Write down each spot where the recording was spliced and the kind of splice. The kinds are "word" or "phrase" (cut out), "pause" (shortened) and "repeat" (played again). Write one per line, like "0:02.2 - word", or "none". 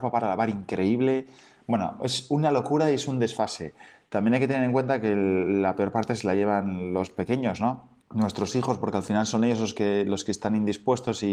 0:08.0 - pause

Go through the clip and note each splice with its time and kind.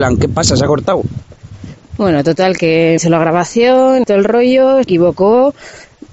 0:03.0 - word
0:04.0 - word
0:04.8 - word

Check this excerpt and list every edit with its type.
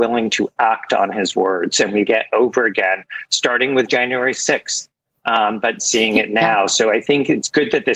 0:02.1 - phrase

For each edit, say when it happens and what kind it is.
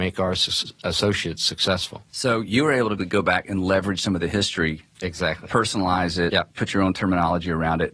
0:02.1 - pause
0:03.0 - word
0:06.5 - pause

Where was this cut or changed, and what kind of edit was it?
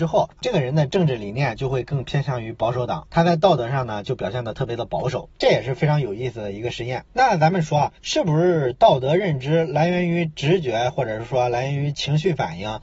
0:07.1 - pause

